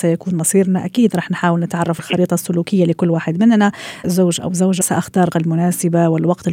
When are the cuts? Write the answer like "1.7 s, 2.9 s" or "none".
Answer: 2.0 s, 4.0 s, 4.8 s, 5.3 s